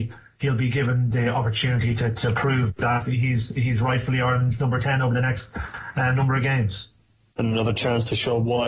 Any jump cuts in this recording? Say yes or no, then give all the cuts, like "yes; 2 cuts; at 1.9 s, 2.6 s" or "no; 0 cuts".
no; 0 cuts